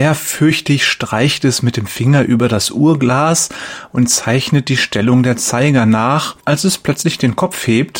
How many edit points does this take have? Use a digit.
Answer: 1